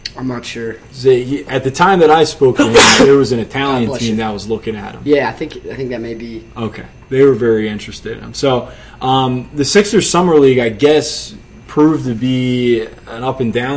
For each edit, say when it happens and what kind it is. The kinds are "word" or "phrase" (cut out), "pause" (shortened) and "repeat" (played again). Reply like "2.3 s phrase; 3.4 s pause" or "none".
none